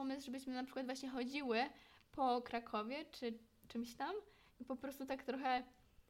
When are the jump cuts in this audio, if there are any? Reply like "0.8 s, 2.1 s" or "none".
none